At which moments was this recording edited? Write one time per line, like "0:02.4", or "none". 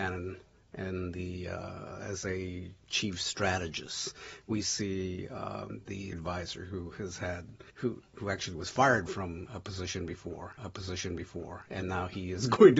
0:06.1
0:07.7
0:10.6